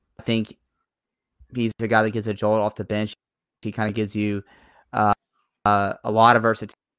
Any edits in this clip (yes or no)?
no